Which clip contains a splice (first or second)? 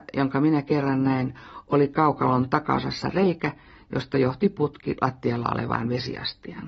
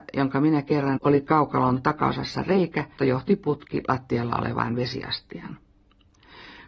second